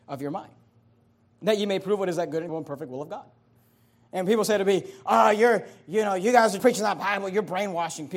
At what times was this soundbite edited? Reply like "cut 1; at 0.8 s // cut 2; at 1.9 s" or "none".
cut 1; at 2.5 s // cut 2; at 6.6 s